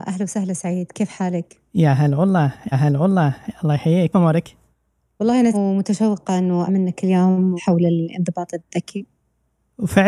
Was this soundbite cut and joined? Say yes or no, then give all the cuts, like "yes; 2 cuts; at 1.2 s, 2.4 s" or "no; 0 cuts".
yes; 5 cuts; at 2.7 s, 4.1 s, 5.5 s, 6.7 s, 7.6 s